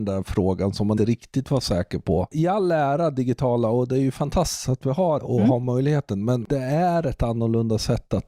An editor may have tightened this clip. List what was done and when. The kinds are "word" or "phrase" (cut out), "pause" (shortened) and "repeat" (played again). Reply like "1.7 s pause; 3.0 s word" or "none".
1.0 s word; 5.2 s word